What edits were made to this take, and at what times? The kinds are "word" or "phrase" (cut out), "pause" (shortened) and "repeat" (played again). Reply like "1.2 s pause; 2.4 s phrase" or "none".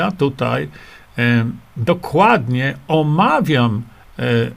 none